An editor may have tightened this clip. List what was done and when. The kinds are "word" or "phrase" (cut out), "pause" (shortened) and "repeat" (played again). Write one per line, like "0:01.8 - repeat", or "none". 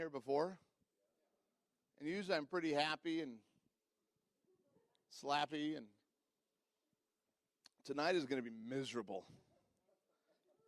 none